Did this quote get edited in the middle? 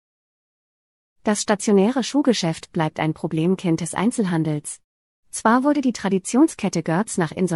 no; 0 cuts

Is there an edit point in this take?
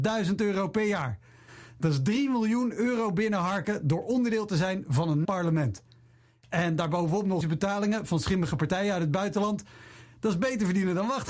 yes; 2 cuts; at 5.2 s, 7.4 s

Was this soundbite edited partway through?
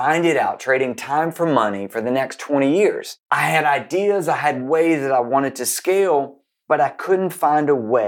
yes; 1 cut; at 3.2 s

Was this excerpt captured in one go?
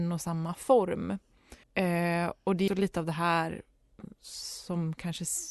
no; 2 cuts; at 1.6 s, 2.7 s

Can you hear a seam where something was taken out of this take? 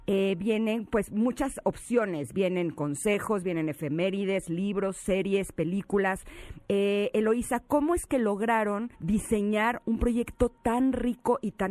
yes; 1 cut; at 8.9 s

